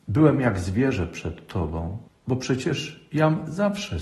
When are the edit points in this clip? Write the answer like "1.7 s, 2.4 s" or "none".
2.1 s